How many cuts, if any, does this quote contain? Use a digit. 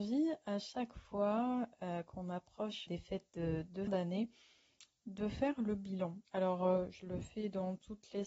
3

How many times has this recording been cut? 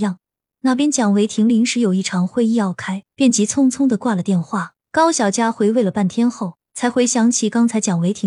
3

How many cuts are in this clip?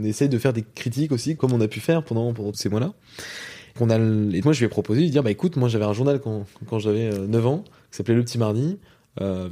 4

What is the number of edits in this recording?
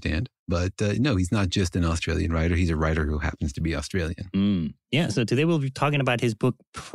0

